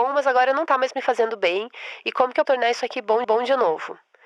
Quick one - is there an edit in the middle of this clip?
yes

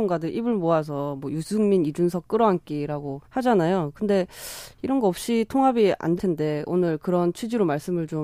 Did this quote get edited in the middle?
yes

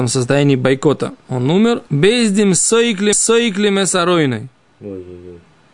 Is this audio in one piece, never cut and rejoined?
no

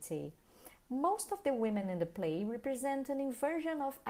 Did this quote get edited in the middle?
no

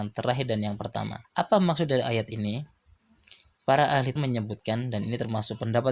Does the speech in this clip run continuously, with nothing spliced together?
no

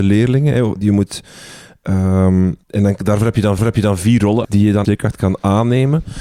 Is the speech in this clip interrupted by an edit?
yes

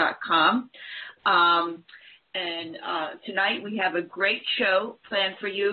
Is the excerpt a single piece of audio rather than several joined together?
yes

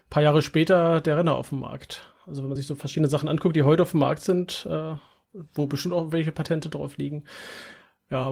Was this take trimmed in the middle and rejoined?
no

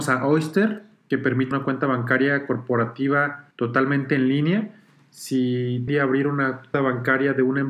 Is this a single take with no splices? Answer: no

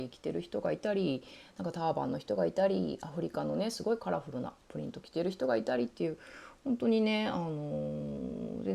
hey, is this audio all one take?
yes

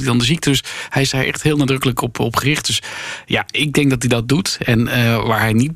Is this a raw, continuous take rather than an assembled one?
yes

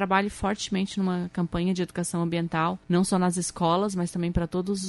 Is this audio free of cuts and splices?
no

